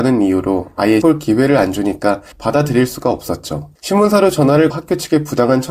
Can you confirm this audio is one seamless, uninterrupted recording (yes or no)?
no